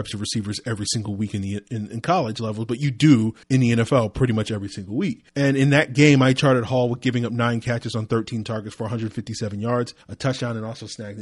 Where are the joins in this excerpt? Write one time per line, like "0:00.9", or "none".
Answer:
0:03.4
0:05.3
0:10.0